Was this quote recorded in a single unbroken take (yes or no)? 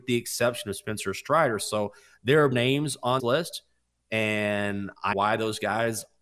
no